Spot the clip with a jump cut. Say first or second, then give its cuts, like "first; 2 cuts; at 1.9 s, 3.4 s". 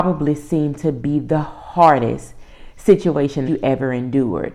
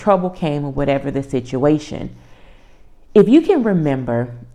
first; 1 cut; at 3.5 s